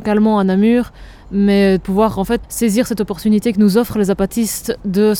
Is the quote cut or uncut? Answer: cut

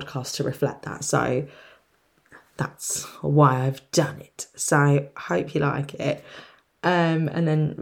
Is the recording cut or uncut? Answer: uncut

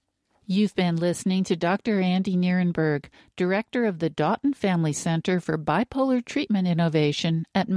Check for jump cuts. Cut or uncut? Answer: uncut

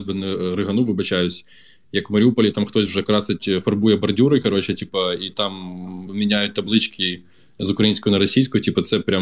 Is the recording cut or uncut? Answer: uncut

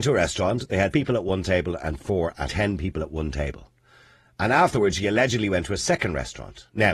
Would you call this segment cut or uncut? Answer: cut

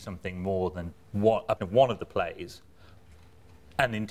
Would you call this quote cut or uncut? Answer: cut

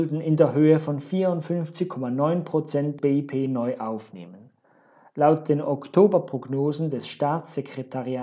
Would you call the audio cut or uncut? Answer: cut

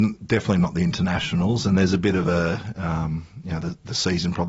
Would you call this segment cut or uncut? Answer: uncut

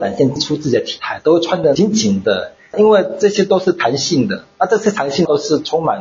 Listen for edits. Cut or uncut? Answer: uncut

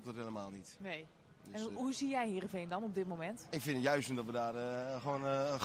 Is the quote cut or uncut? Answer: cut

